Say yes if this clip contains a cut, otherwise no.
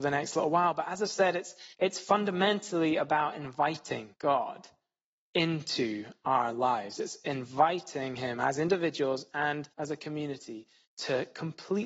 yes